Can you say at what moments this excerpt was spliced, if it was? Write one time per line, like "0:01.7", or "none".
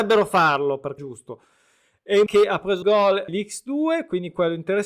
0:01.0
0:02.3
0:02.8
0:03.3